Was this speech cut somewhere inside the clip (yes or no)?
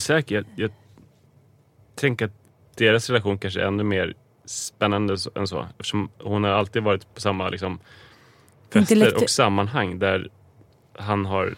no